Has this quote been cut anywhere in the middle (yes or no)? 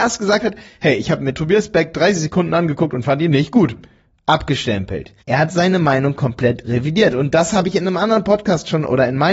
yes